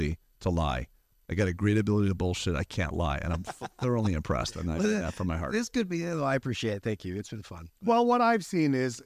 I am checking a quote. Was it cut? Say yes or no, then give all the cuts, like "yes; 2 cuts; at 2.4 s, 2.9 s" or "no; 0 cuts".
no; 0 cuts